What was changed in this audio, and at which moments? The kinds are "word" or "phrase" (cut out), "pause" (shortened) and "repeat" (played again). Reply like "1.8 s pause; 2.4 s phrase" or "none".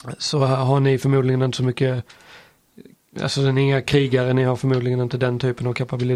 none